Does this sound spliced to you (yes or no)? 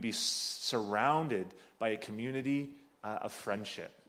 no